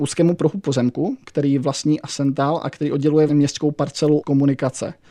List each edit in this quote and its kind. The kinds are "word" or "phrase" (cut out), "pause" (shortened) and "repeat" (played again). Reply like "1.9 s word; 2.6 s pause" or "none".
3.3 s word; 4.2 s word